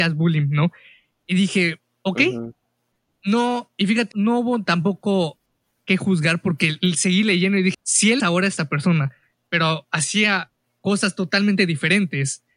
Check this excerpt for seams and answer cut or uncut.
cut